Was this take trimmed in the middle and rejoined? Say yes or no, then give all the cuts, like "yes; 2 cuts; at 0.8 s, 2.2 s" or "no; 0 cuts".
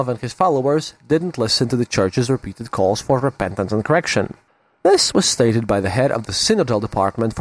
no; 0 cuts